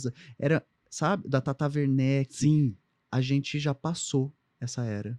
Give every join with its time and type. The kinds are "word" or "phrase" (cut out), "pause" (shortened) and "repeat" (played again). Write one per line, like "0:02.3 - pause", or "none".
none